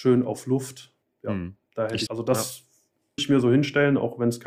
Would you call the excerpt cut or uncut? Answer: cut